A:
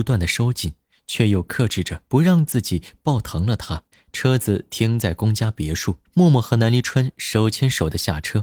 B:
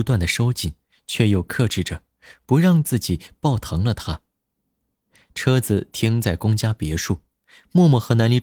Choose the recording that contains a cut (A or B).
A